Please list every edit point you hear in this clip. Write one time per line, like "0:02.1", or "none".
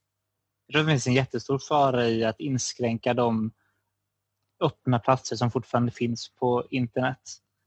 none